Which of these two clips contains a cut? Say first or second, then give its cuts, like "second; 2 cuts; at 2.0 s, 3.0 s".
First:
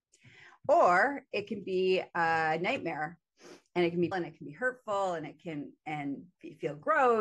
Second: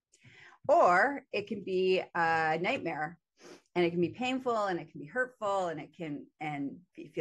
first; 1 cut; at 4.1 s